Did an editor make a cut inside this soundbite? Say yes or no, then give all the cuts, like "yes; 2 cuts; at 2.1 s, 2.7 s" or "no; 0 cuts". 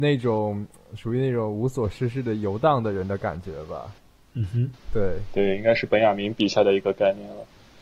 no; 0 cuts